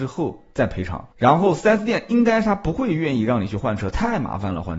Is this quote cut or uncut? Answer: cut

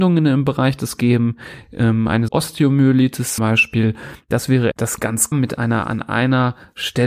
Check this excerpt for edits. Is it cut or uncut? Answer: cut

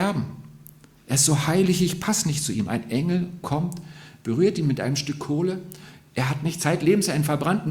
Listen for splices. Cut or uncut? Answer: uncut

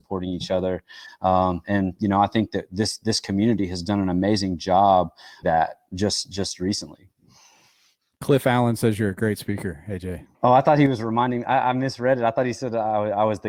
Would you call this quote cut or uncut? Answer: cut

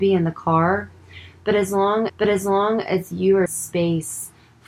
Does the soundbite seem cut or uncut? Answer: cut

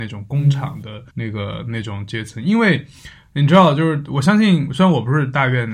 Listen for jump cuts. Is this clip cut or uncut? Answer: cut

